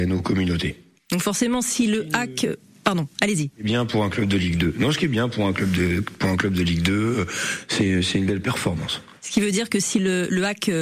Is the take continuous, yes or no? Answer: yes